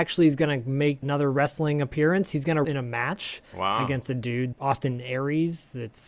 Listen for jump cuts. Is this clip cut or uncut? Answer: cut